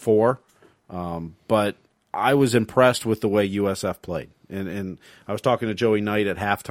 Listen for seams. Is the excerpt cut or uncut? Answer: uncut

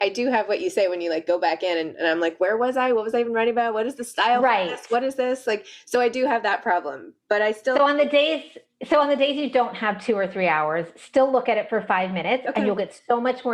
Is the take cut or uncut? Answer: uncut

